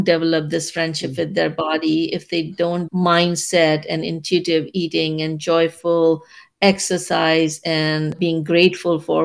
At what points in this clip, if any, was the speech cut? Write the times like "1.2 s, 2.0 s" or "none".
2.9 s